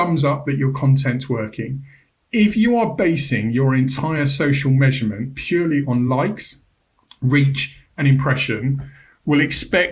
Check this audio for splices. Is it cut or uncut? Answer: uncut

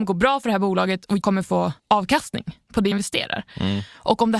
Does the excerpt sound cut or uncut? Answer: cut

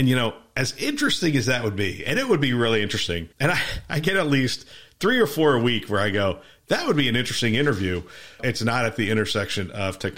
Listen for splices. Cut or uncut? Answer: cut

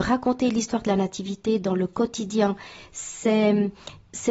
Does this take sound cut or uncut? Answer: uncut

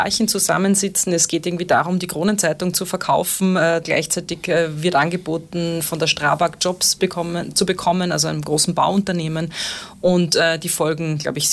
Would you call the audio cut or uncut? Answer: cut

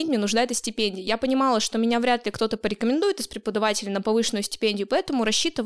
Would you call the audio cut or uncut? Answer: uncut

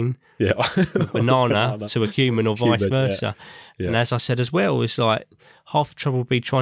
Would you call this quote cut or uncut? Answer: uncut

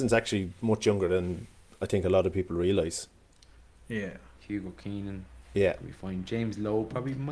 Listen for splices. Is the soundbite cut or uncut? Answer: uncut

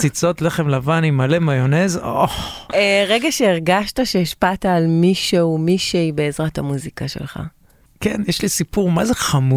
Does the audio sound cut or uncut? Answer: uncut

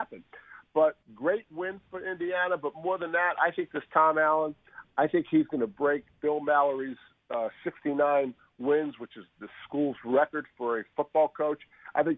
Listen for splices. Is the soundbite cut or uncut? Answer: cut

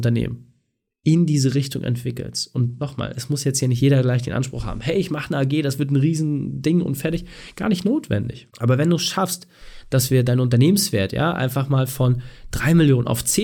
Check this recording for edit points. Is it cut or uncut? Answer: cut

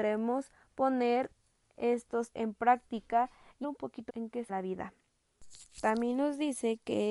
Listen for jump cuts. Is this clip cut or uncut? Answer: cut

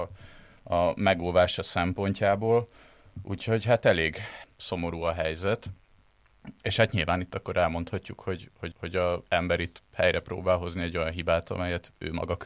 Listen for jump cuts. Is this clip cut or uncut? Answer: cut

